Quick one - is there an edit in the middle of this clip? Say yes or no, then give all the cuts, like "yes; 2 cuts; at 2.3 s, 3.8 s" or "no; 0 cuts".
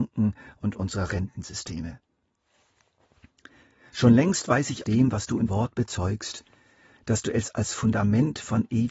yes; 2 cuts; at 4.8 s, 5.5 s